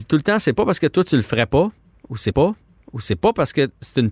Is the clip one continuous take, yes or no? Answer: no